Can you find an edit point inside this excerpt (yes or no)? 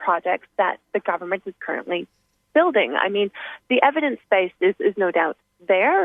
no